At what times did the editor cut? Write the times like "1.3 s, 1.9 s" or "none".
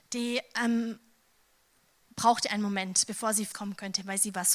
3.5 s